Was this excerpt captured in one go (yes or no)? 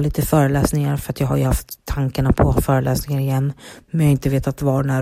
yes